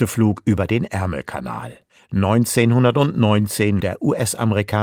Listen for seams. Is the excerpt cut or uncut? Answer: cut